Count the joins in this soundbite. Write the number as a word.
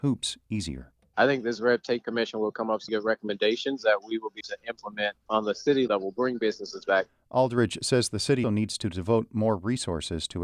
four